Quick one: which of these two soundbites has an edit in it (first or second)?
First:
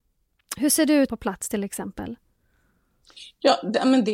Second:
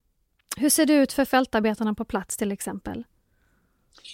first